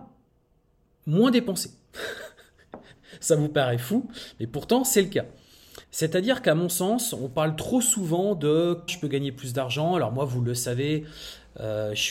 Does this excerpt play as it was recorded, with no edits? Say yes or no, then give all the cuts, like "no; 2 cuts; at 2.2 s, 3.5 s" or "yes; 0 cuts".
no; 2 cuts; at 5.8 s, 8.9 s